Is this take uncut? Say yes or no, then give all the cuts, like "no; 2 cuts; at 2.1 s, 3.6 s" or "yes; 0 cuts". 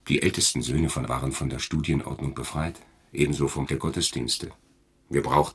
no; 2 cuts; at 1.1 s, 3.7 s